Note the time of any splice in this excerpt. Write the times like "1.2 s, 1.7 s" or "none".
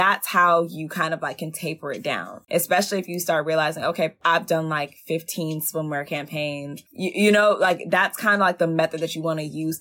none

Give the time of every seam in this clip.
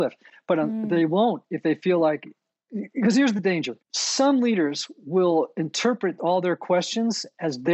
3.8 s

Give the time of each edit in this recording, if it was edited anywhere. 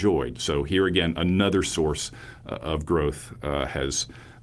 none

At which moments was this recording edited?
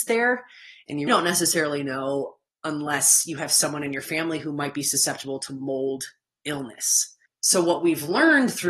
1.1 s, 2.5 s, 7.3 s

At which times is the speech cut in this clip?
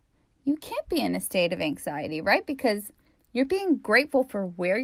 none

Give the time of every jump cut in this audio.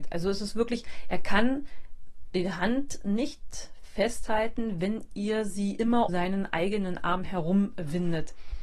6.1 s

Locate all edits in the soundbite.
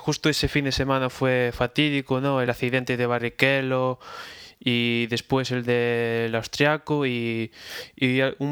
none

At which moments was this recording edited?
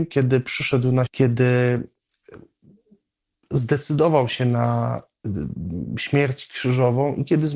1.1 s

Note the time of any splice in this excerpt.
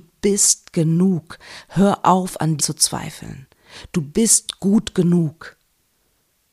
2.6 s

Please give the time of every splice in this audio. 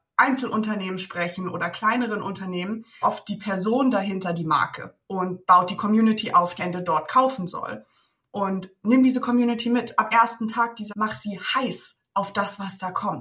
3.0 s, 5.0 s, 6.6 s, 10.1 s, 10.9 s

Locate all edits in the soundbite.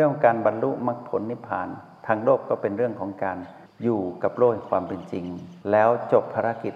5.6 s

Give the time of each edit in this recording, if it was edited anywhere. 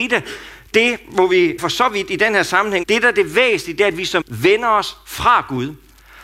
1.6 s, 2.8 s, 4.2 s

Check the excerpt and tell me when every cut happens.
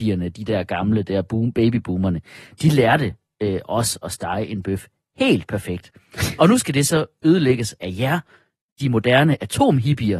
none

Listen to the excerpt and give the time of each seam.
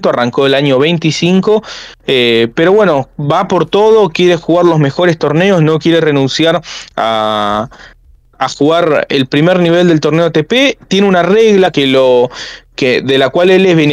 none

